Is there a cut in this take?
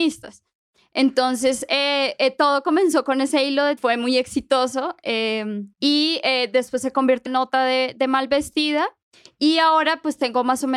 yes; 3 cuts; at 3.8 s, 5.7 s, 7.3 s

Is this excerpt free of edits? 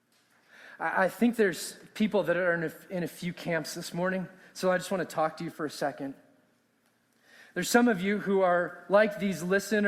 no; 1 cut; at 5.5 s

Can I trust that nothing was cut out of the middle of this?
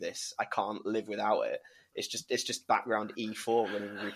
yes; 0 cuts

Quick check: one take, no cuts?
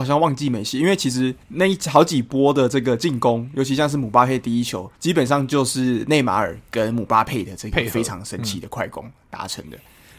no; 2 cuts; at 1.4 s, 5.0 s

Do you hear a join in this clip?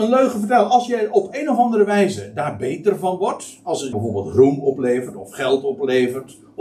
yes; 1 cut; at 3.9 s

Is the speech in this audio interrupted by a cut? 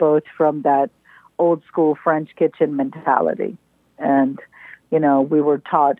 no; 0 cuts

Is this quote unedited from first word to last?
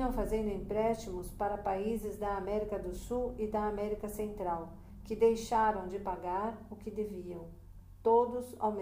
yes; 0 cuts

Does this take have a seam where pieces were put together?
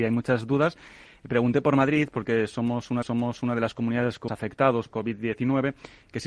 yes; 3 cuts; at 3.0 s, 4.3 s, 4.9 s

